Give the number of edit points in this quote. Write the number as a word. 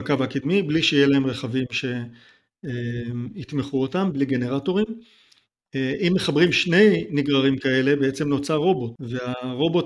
zero